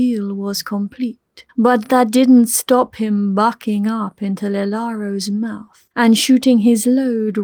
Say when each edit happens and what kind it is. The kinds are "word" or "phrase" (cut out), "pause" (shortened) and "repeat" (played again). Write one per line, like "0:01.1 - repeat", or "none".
0:01.5 - pause
0:05.9 - pause